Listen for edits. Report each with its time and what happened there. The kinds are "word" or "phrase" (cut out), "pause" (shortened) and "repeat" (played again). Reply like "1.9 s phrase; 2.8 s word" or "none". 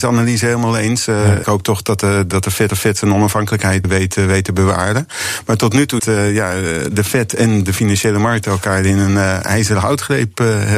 1.4 s phrase; 2.7 s repeat; 3.8 s word; 6.0 s phrase